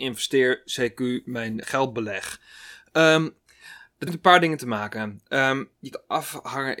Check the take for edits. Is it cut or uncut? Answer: cut